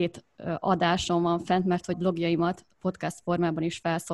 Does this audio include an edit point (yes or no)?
yes